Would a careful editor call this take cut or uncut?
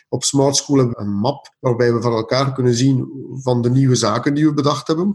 cut